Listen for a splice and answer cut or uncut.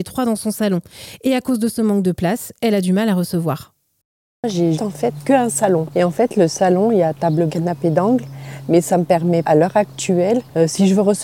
cut